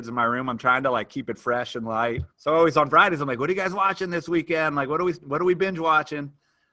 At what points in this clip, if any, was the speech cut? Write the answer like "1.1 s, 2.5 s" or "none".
2.3 s